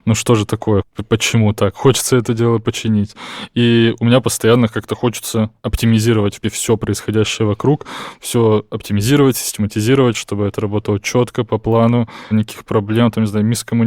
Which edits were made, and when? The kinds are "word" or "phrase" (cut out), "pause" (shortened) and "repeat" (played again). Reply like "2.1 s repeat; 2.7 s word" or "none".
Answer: 6.4 s word; 12.3 s phrase